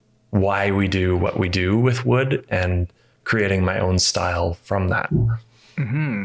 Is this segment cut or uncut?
uncut